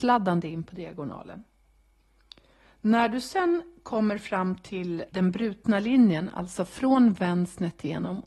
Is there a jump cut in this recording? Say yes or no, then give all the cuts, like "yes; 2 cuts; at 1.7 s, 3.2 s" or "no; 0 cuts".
yes; 1 cut; at 5.1 s